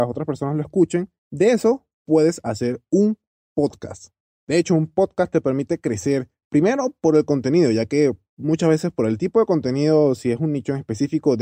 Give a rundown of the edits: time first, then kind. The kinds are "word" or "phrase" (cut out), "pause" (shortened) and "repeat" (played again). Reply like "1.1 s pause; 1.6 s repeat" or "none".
1.2 s pause